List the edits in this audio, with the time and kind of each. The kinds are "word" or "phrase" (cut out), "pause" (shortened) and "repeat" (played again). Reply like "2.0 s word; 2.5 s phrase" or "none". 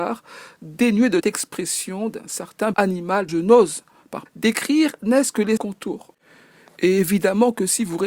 1.2 s word; 2.7 s word; 3.3 s word; 4.3 s word; 5.6 s word